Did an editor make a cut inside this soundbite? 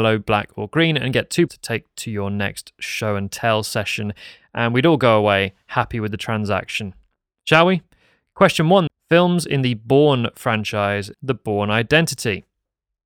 yes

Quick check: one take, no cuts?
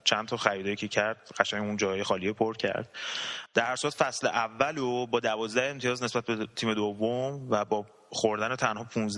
yes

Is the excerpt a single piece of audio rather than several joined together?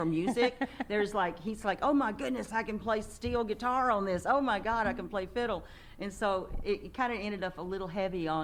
yes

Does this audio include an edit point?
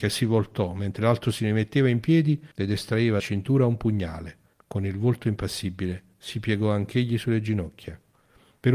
yes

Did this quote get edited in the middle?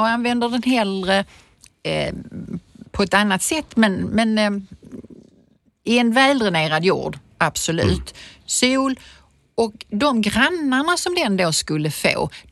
no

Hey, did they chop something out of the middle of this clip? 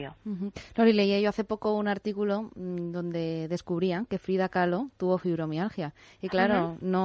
no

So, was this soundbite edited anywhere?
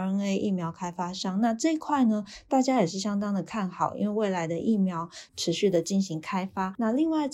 yes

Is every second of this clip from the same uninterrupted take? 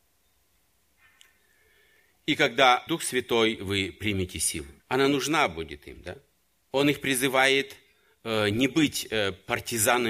no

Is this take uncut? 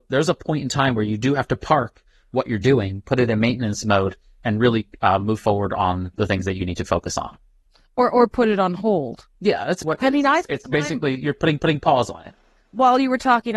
no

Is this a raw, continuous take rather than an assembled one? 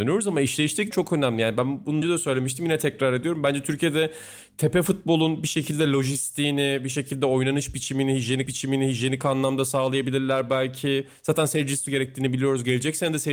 no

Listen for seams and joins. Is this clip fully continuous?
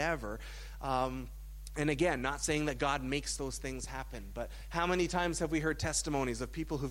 yes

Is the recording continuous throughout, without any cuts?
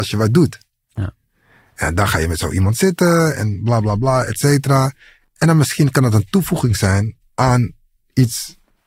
yes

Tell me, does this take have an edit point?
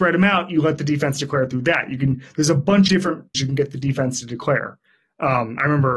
yes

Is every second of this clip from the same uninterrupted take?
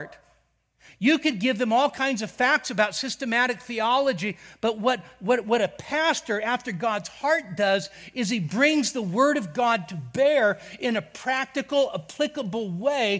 yes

